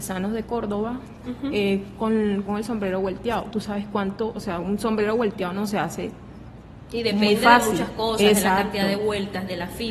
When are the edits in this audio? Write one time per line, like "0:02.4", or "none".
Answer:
0:02.5